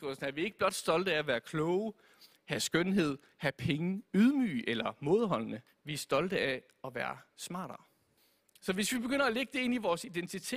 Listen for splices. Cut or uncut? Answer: cut